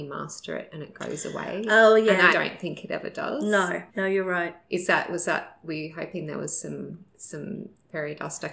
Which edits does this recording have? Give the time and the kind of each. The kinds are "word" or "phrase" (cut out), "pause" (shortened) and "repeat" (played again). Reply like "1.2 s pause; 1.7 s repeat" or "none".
2.3 s word; 3.9 s pause; 7.1 s pause